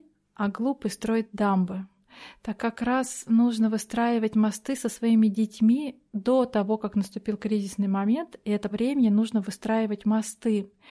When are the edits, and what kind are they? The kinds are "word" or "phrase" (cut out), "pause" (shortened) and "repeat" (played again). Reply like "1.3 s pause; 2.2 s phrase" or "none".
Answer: 2.6 s word; 6.1 s pause; 8.7 s phrase